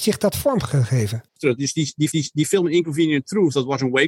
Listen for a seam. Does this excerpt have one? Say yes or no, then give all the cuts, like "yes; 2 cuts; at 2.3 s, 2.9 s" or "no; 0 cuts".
yes; 2 cuts; at 1.3 s, 2.1 s